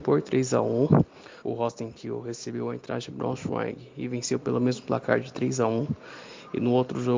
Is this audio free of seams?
no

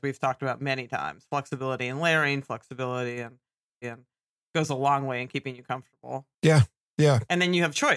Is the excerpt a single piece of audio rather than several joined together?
no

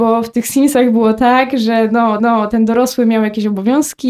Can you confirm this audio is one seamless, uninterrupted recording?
no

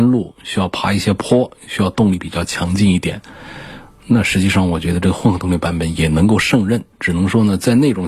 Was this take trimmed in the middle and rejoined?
yes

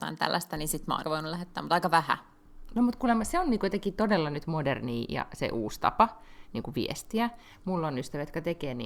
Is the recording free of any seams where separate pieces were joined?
no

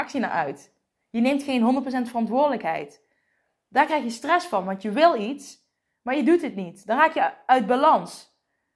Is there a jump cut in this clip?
no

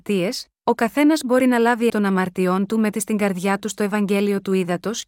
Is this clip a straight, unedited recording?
no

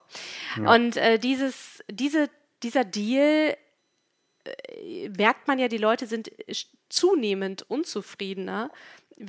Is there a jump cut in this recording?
no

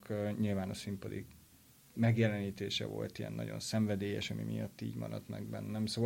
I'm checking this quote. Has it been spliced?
no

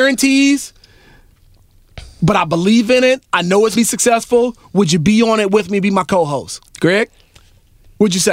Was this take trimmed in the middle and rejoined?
yes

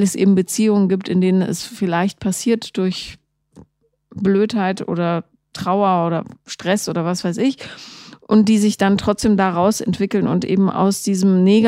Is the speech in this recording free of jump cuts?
yes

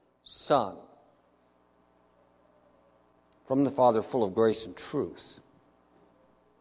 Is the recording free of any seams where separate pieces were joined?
yes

